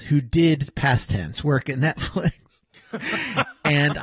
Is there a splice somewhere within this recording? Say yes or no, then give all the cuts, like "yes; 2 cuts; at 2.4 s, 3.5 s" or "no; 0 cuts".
no; 0 cuts